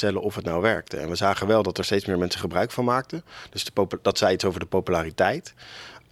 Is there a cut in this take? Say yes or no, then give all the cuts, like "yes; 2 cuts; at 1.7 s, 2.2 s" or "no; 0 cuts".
no; 0 cuts